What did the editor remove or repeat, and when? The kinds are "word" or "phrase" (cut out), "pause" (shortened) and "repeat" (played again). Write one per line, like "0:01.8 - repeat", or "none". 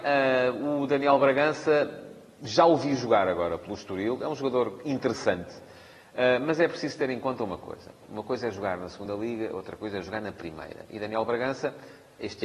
none